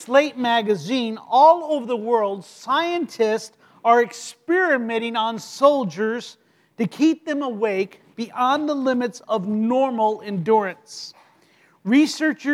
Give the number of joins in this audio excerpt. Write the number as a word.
zero